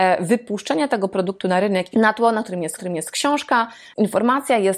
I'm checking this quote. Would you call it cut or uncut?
cut